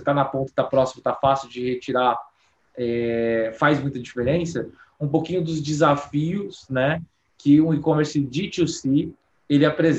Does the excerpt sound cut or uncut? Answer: uncut